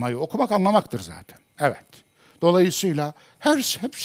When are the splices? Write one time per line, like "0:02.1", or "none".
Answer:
0:01.5